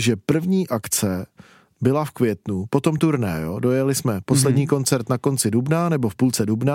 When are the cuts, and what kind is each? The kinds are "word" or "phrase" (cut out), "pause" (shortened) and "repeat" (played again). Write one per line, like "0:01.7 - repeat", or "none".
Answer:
none